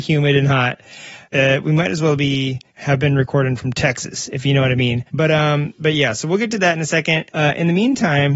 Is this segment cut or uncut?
cut